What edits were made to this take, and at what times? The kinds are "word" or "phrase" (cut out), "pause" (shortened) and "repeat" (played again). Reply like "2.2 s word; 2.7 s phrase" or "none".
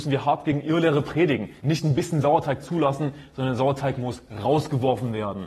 1.6 s pause